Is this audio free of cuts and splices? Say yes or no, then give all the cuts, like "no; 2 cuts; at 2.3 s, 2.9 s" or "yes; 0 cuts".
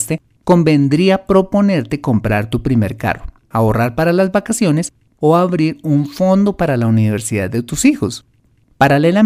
yes; 0 cuts